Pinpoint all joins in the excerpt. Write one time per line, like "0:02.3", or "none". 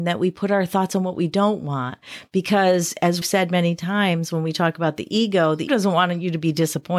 0:03.2
0:05.7